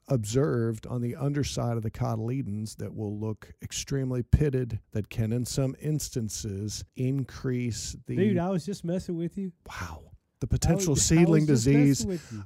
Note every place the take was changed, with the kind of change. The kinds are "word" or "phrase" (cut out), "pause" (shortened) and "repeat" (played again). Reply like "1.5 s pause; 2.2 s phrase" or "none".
4.8 s pause; 6.9 s pause